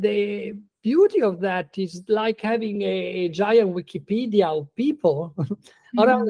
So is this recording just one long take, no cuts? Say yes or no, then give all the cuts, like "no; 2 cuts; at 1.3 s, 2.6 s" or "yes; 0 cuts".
yes; 0 cuts